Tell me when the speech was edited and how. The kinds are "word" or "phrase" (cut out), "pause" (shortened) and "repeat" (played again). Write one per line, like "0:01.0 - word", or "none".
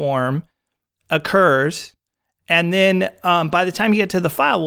none